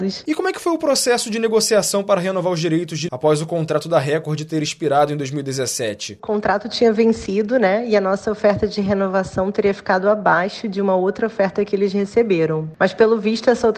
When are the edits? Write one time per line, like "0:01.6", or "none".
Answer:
0:03.1